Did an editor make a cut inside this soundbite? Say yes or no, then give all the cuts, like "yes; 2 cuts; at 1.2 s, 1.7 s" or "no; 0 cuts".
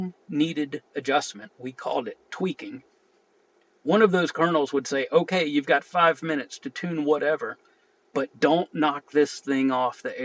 no; 0 cuts